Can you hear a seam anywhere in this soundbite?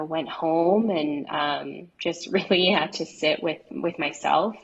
yes; 1 cut; at 1.9 s

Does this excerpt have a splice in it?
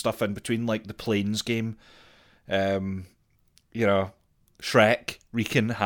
no; 0 cuts

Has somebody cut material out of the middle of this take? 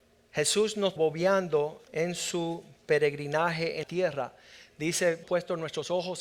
yes; 3 cuts; at 1.0 s, 3.8 s, 5.2 s

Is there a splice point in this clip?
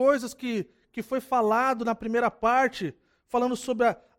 no; 0 cuts

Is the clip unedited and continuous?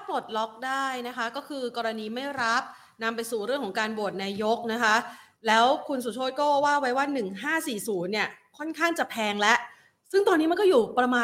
yes; 0 cuts

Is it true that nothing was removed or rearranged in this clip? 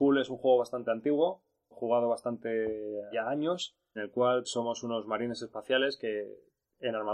no; 4 cuts; at 1.7 s, 3.1 s, 4.0 s, 4.4 s

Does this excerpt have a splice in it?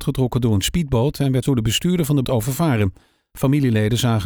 yes; 2 cuts; at 1.4 s, 2.2 s

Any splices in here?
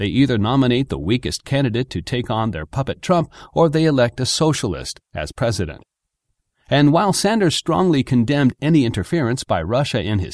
no; 0 cuts

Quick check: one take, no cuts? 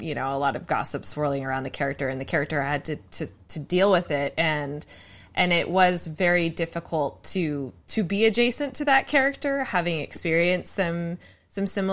yes; 0 cuts

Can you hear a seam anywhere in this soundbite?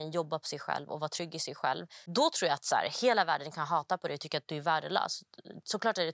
yes; 1 cut; at 2.1 s

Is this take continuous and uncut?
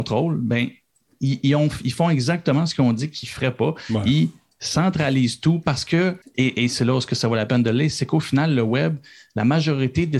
no; 1 cut; at 6.2 s

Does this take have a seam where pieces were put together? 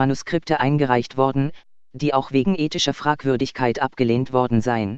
no; 0 cuts

